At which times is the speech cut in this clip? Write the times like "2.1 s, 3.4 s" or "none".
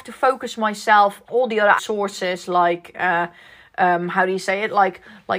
1.3 s, 1.8 s